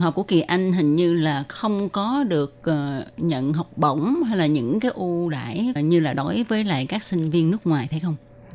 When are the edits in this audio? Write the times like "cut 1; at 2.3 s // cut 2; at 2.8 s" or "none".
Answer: none